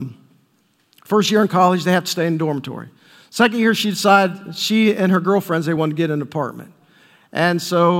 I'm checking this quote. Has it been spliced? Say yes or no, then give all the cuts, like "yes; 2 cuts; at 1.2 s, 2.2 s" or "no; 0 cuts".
no; 0 cuts